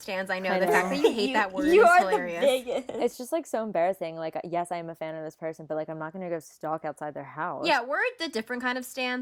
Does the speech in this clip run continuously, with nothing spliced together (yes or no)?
yes